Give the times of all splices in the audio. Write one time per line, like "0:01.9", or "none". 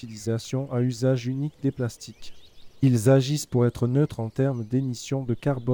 none